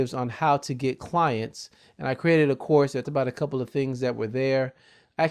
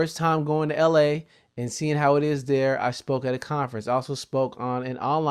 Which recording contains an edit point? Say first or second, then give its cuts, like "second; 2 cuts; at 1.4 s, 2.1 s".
first; 1 cut; at 3.0 s